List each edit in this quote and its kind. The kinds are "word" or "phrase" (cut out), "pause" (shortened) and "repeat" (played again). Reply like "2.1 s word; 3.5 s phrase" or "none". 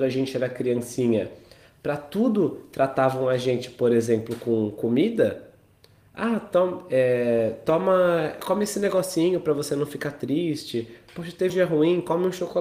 11.5 s word

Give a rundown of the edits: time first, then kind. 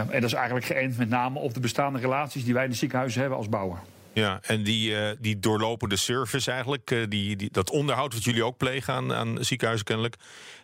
none

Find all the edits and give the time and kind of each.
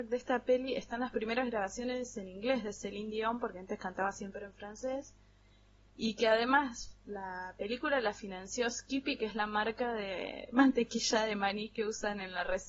none

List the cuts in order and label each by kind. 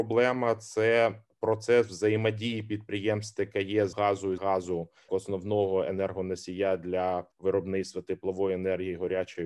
3.9 s word; 4.4 s word; 5.1 s word; 7.3 s pause

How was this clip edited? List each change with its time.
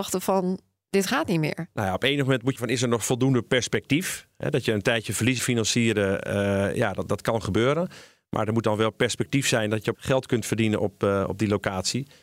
2.6 s phrase; 5.4 s word; 9.9 s phrase

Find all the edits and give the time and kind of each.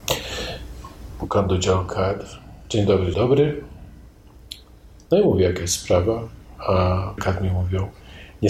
3.1 s word; 7.2 s word

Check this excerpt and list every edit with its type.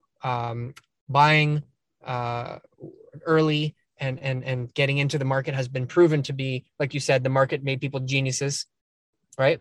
none

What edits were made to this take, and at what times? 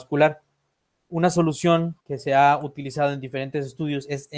2.0 s pause

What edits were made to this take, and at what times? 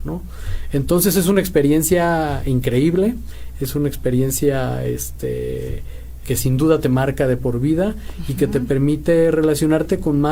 6.2 s word

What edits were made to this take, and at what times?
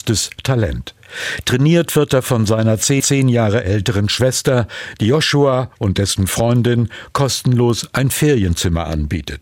3.0 s repeat

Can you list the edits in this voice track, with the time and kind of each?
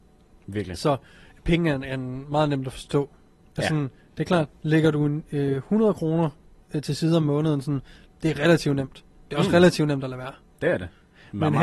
none

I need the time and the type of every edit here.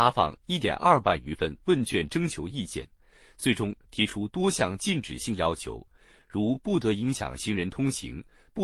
none

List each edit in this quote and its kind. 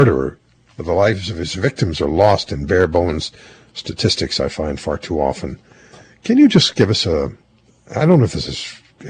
none

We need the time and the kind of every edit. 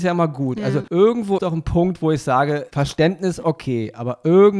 1.4 s word

